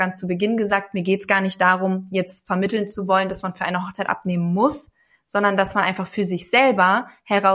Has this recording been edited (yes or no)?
no